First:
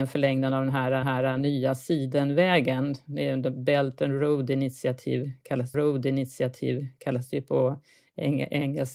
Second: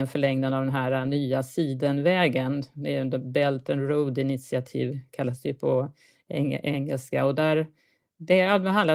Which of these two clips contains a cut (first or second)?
first